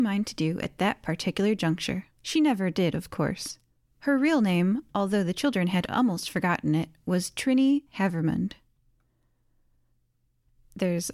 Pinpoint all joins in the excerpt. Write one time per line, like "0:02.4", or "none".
0:02.1
0:03.8
0:07.9